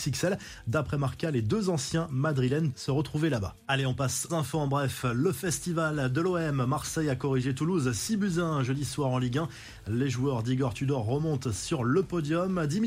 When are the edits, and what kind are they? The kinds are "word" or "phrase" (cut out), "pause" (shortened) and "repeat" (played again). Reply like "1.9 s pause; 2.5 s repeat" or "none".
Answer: 2.7 s word; 4.3 s word